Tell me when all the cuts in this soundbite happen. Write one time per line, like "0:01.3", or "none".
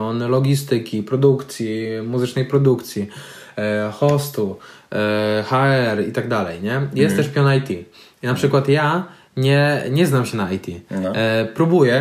none